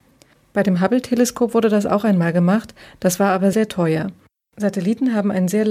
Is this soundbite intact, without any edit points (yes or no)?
no